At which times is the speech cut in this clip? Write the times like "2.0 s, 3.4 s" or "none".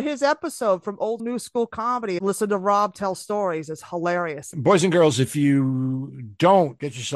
1.2 s